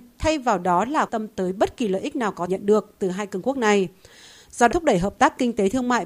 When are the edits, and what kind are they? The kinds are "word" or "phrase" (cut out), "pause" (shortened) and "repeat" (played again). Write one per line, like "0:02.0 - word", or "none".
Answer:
0:01.1 - word
0:02.5 - word
0:04.7 - word